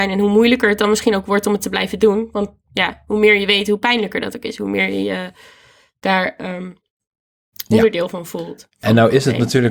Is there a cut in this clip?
no; 0 cuts

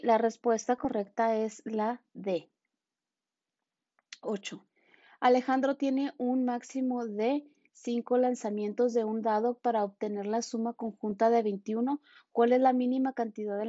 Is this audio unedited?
yes; 0 cuts

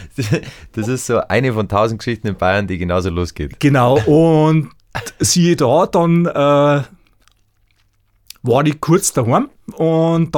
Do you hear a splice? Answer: no; 0 cuts

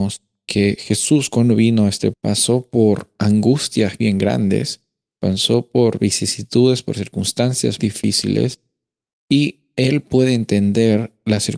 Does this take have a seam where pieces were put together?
yes; 2 cuts; at 2.1 s, 7.8 s

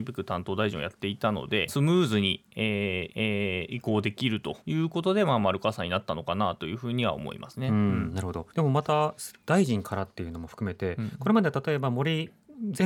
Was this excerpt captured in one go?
no; 4 cuts; at 1.7 s, 3.1 s, 4.6 s, 8.5 s

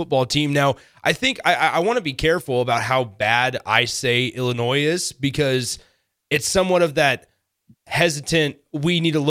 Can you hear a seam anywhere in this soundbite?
no; 0 cuts

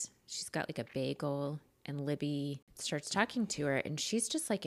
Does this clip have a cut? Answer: no; 0 cuts

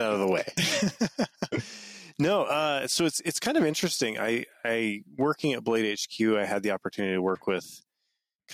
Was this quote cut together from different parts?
no; 0 cuts

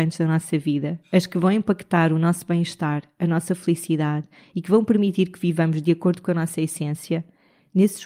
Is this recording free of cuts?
yes; 0 cuts

